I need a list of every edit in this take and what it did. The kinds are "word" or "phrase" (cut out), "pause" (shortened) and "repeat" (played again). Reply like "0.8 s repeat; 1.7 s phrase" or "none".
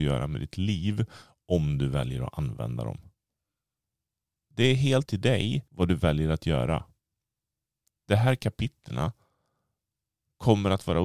5.1 s word; 5.7 s pause